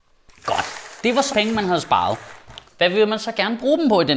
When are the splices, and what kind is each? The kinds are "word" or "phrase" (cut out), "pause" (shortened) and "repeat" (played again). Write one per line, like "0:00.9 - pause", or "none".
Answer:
0:01.3 - word
0:02.7 - pause